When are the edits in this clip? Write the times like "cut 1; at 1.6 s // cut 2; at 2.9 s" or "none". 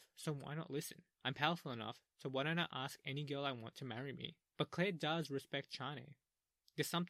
cut 1; at 1.1 s // cut 2; at 4.5 s